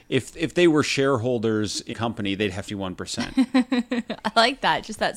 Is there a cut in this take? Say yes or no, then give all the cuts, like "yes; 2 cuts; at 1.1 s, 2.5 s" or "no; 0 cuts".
yes; 2 cuts; at 1.9 s, 2.7 s